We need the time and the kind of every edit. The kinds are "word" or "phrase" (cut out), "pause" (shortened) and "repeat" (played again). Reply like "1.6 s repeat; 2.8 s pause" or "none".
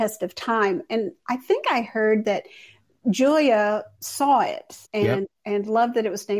3.9 s pause; 4.8 s pause; 5.3 s pause